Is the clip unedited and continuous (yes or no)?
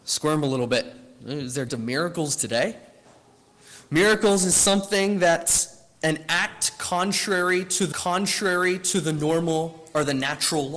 no